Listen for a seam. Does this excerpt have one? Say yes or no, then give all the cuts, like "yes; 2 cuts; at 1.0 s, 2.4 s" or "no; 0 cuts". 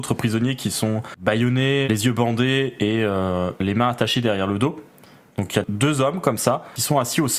yes; 1 cut; at 1.8 s